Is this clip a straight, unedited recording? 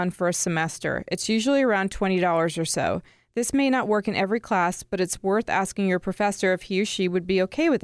yes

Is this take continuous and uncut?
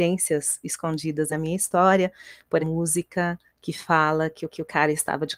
no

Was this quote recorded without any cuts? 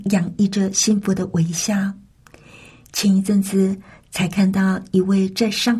yes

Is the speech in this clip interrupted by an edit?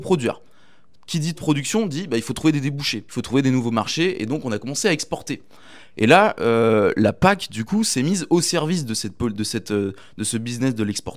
yes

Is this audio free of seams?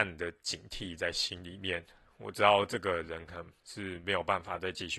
yes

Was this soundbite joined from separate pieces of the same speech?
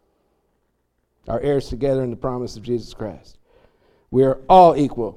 no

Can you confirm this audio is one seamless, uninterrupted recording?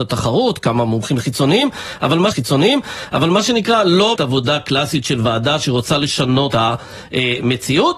no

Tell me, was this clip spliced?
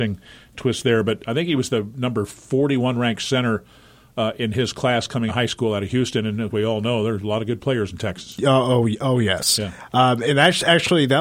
yes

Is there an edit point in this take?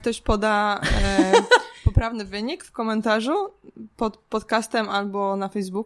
no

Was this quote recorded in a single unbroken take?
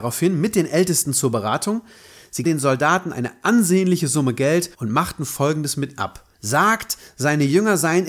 no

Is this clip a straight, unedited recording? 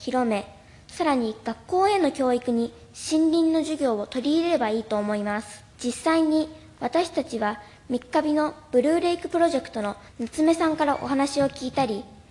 no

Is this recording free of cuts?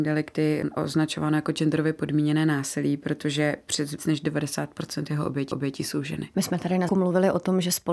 no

